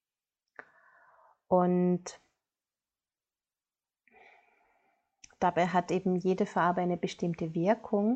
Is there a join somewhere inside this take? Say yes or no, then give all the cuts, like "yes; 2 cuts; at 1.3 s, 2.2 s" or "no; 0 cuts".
no; 0 cuts